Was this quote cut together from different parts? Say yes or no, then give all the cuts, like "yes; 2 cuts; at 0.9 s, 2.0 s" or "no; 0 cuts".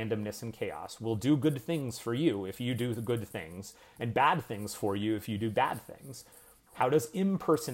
no; 0 cuts